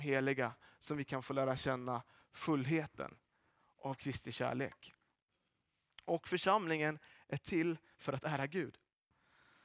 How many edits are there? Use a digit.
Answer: 0